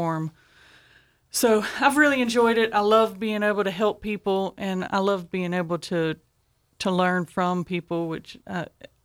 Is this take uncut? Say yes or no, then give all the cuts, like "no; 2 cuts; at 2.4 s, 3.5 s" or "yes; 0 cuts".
yes; 0 cuts